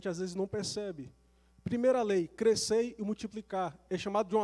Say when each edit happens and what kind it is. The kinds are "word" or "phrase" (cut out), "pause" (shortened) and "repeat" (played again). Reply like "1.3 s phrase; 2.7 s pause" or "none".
none